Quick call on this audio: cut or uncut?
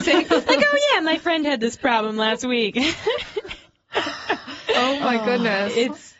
uncut